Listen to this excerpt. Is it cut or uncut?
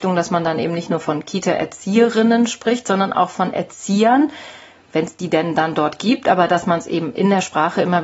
uncut